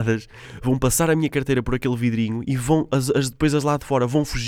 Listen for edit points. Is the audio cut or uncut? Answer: uncut